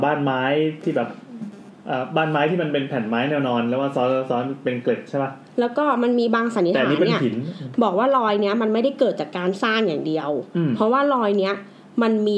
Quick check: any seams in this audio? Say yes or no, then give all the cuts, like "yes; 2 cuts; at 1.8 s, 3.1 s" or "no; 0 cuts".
yes; 1 cut; at 5.5 s